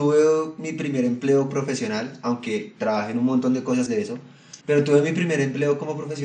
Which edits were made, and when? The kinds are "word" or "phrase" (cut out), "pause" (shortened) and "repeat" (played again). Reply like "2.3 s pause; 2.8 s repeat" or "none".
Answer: 1.5 s word; 3.9 s word; 4.6 s pause